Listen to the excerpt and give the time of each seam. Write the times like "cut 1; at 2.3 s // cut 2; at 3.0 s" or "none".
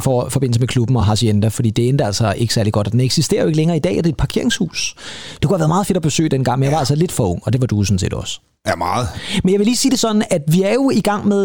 none